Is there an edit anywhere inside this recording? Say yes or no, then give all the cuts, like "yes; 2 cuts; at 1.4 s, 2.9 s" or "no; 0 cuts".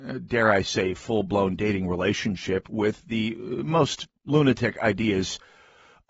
no; 0 cuts